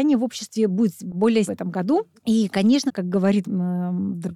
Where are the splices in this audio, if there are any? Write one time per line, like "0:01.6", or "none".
0:01.5
0:02.2
0:02.9
0:03.4